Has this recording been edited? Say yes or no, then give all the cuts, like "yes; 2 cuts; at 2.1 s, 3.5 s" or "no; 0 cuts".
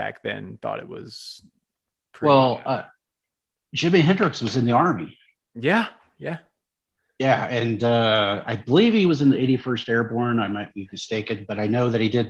no; 0 cuts